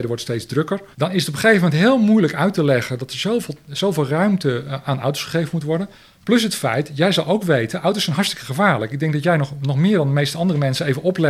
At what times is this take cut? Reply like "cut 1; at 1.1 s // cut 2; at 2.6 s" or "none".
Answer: cut 1; at 0.9 s // cut 2; at 5.9 s